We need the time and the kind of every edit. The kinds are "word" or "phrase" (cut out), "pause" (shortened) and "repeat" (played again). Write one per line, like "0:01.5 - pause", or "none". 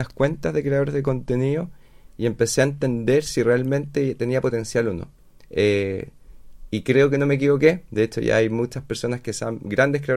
none